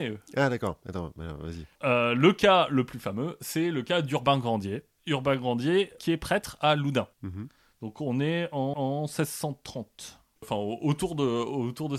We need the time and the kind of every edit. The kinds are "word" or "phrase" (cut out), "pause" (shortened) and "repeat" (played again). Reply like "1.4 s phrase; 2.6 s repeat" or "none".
7.1 s pause; 8.7 s repeat